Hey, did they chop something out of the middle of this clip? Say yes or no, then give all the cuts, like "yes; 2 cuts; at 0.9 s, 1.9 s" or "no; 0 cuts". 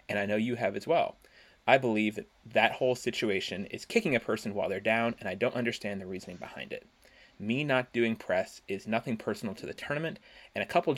no; 0 cuts